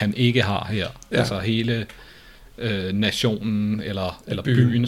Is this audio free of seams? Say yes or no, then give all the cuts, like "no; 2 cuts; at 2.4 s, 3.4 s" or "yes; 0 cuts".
yes; 0 cuts